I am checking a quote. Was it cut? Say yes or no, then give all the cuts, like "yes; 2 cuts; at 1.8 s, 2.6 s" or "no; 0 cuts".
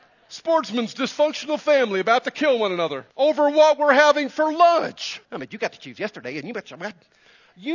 yes; 2 cuts; at 3.1 s, 5.2 s